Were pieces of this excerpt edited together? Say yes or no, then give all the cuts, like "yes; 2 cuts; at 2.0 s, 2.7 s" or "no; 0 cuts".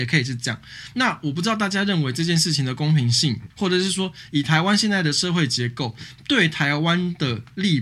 yes; 1 cut; at 3.5 s